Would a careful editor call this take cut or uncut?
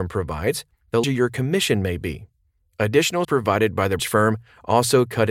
cut